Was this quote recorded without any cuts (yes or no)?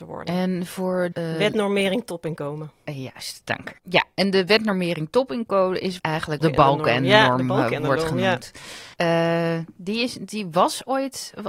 no